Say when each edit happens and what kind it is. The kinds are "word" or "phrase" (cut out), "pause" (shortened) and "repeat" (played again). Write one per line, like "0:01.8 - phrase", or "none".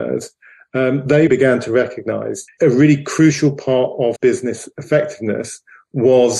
0:01.3 - word
0:02.5 - word
0:04.2 - word